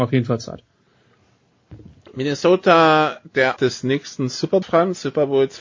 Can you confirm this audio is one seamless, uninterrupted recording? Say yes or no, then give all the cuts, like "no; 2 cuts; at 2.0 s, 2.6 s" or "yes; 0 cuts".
no; 2 cuts; at 3.6 s, 4.6 s